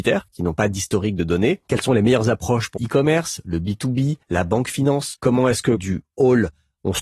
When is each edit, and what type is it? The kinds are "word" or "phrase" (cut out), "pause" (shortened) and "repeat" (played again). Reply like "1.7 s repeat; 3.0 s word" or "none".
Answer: 2.8 s word; 4.2 s pause; 5.2 s pause; 5.8 s phrase